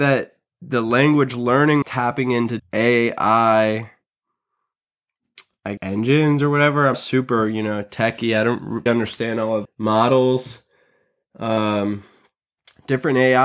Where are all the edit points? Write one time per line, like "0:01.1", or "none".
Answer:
0:01.8
0:02.6
0:05.8
0:06.9
0:08.9
0:09.6

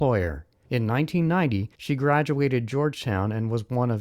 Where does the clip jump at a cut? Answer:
0:01.7

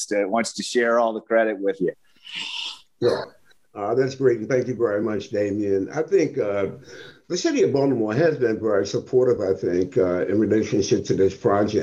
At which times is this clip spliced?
none

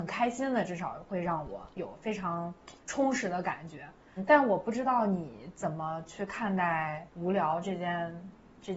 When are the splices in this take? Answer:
0:01.7
0:02.8
0:07.1

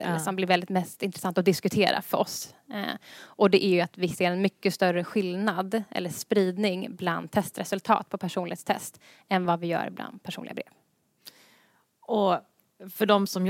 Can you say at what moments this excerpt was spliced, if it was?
none

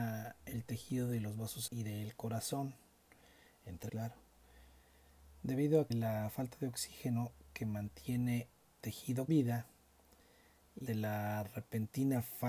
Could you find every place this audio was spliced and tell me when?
0:01.7
0:03.9
0:05.9
0:08.8
0:09.3
0:10.9

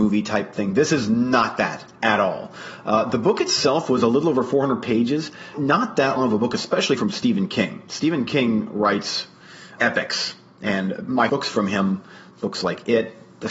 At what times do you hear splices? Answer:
0:05.5
0:06.2
0:07.0
0:09.8
0:11.3

